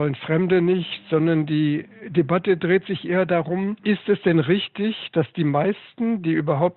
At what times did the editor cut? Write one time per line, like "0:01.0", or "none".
0:03.8